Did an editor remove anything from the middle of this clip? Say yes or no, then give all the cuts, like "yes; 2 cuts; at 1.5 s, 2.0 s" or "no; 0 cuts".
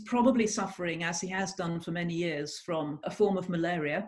no; 0 cuts